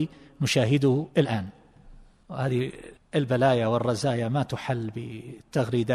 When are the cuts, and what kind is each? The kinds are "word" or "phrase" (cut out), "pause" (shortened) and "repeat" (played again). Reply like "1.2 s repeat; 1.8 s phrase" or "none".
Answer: 1.1 s pause